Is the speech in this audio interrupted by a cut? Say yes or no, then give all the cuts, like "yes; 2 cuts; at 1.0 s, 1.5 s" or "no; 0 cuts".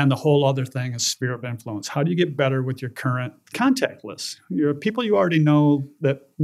yes; 1 cut; at 3.4 s